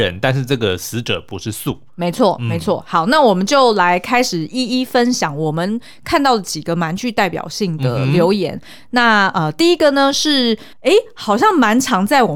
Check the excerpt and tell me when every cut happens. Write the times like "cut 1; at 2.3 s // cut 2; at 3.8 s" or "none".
cut 1; at 10.7 s